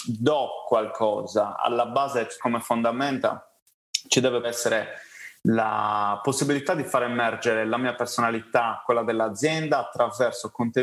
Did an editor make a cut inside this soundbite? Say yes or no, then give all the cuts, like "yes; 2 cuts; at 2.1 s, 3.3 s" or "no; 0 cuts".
yes; 2 cuts; at 2.4 s, 4.4 s